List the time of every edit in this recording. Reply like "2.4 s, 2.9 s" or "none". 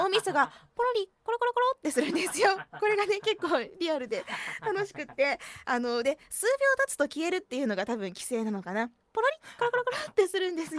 9.0 s